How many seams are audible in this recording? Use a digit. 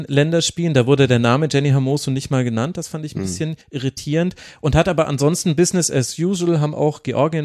1